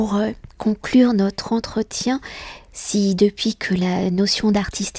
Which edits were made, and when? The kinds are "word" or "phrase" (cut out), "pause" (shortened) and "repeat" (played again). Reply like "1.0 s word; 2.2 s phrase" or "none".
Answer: none